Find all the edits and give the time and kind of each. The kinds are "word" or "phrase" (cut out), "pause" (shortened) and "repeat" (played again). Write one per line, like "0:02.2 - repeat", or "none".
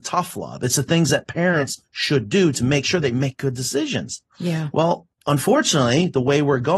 none